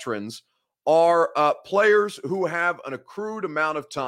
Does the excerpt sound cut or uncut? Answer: uncut